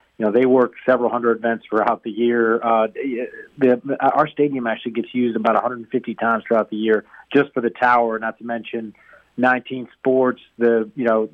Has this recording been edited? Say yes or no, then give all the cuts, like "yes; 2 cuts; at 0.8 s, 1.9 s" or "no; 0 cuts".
no; 0 cuts